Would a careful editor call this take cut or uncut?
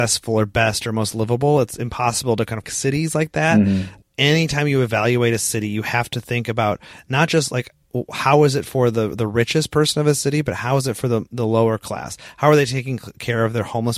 cut